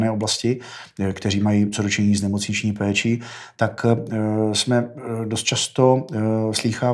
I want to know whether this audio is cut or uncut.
uncut